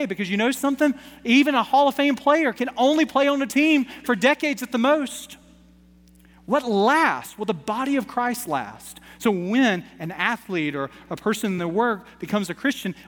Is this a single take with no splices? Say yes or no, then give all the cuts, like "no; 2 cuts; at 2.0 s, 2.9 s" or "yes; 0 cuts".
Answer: yes; 0 cuts